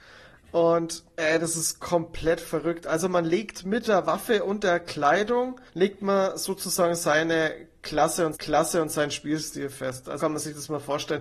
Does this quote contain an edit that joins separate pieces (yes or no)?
yes